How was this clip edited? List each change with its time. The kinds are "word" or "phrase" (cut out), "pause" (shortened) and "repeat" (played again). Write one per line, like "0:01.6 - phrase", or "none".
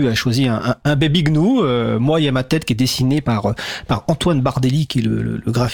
none